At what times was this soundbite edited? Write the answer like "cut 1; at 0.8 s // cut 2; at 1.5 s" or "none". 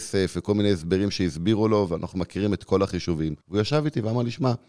cut 1; at 3.4 s

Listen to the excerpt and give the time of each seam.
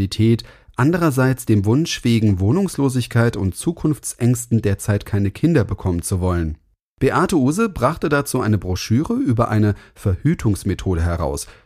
none

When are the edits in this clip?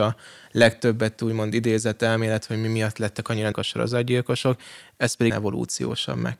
cut 1; at 3.5 s // cut 2; at 5.3 s

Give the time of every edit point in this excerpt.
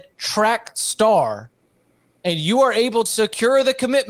cut 1; at 3.1 s

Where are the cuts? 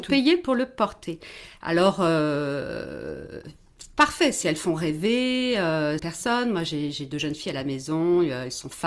cut 1; at 6.0 s

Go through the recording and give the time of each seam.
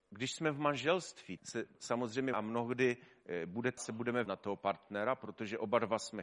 cut 1; at 1.4 s // cut 2; at 2.3 s // cut 3; at 3.8 s // cut 4; at 4.3 s

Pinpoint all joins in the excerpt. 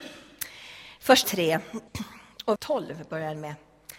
cut 1; at 1.2 s // cut 2; at 1.9 s // cut 3; at 2.6 s

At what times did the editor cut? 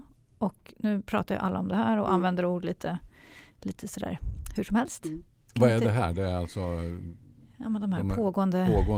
none

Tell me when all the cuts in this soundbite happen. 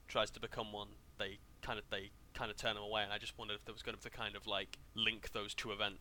cut 1; at 1.8 s // cut 2; at 4.0 s // cut 3; at 4.9 s

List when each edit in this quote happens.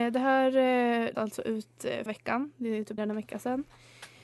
cut 1; at 1.1 s // cut 2; at 2.1 s // cut 3; at 3.0 s

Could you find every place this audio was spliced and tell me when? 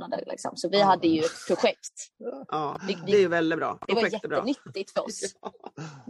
none

